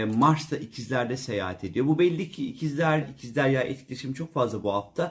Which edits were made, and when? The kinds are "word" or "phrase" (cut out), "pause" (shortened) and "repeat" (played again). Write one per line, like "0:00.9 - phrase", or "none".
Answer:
0:03.0 - word